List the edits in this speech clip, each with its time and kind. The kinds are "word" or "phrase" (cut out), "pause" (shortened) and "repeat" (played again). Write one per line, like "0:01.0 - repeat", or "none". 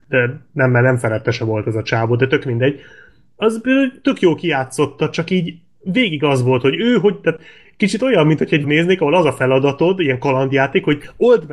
0:08.6 - word